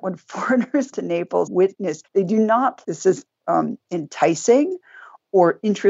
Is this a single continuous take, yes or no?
no